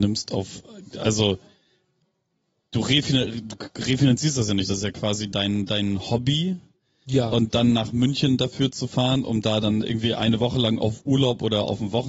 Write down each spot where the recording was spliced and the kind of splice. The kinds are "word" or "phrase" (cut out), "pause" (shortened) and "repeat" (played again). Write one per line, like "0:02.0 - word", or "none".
none